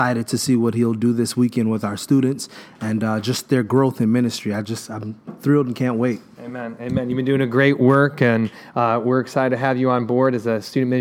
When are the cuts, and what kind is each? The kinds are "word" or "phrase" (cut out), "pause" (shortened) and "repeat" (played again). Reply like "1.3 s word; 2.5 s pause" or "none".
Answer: none